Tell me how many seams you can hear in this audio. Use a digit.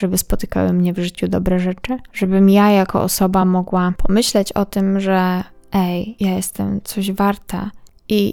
0